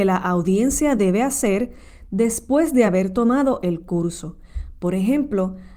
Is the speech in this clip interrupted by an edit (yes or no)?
no